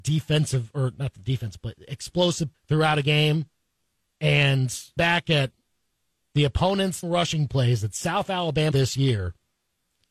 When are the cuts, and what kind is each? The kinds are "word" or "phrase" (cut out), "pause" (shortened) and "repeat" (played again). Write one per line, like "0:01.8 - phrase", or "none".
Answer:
0:02.5 - word
0:05.0 - word
0:07.0 - word
0:08.7 - word